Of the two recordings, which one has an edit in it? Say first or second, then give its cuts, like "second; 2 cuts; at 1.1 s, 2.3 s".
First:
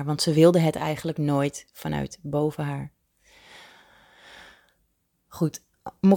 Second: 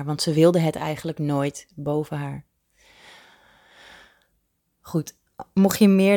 second; 1 cut; at 1.7 s